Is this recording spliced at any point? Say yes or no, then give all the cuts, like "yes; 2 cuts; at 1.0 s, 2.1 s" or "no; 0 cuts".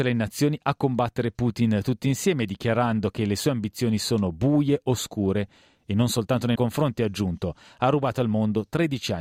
yes; 1 cut; at 6.6 s